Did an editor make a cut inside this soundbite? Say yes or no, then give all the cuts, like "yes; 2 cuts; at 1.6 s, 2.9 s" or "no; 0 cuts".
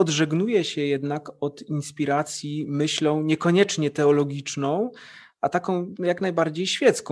no; 0 cuts